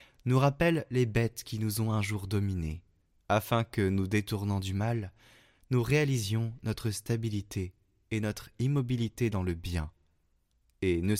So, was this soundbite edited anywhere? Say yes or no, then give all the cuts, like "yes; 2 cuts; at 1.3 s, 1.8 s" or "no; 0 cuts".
no; 0 cuts